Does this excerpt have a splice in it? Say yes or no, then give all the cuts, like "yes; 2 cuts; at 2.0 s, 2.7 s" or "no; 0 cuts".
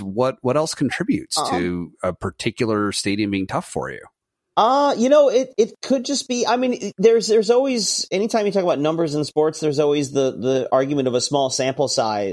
no; 0 cuts